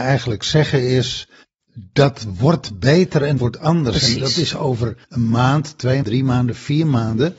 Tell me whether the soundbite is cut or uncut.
cut